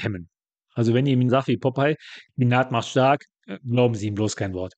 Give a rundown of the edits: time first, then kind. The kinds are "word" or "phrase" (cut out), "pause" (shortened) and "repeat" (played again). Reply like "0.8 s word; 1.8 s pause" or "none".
1.3 s word; 2.3 s pause

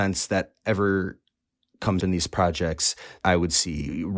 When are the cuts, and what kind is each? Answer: 2.0 s word; 3.2 s word

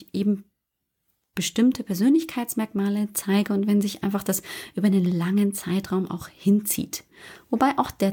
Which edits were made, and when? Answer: none

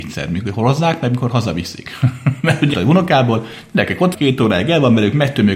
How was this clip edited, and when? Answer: 2.7 s phrase; 4.1 s word

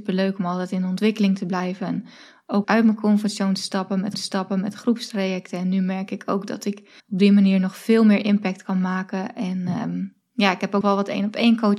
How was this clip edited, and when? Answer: 2.6 s word; 4.1 s repeat; 7.0 s pause; 10.8 s word

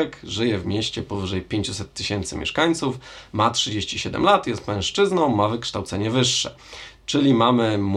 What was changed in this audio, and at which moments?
none

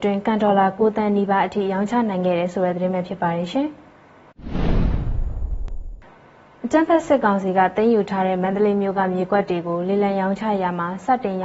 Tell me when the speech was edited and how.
none

